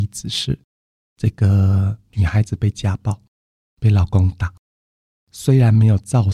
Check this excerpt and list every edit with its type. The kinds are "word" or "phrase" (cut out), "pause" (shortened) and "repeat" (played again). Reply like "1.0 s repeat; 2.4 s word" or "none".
none

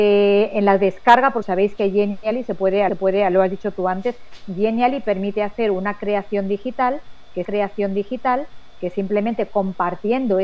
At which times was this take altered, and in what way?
1.4 s word; 2.9 s repeat; 7.4 s repeat

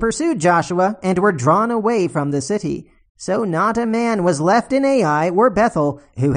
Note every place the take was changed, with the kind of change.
none

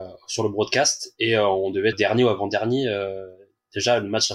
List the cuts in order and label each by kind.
1.9 s word

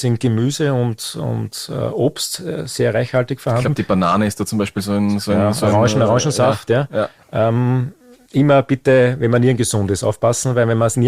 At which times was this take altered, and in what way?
none

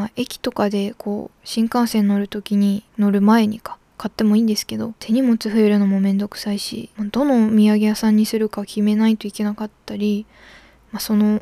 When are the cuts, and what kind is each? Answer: 2.9 s pause

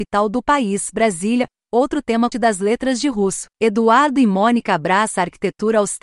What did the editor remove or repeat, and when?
2.3 s word; 3.5 s pause

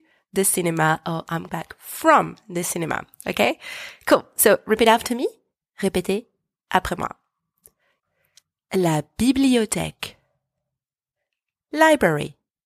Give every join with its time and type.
1.5 s word

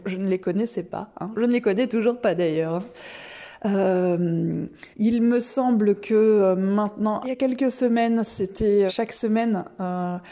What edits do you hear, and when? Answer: 1.3 s word; 4.9 s pause; 7.2 s phrase; 8.9 s word

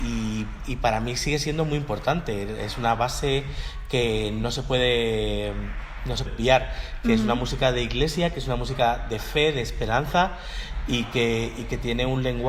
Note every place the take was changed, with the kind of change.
6.3 s word

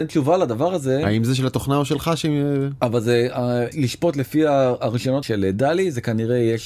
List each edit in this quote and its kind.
3.7 s word; 5.2 s word

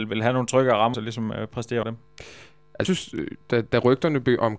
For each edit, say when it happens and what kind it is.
0.9 s word; 1.8 s word; 2.8 s word

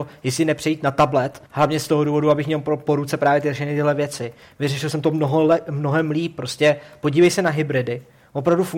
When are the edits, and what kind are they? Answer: 1.5 s pause

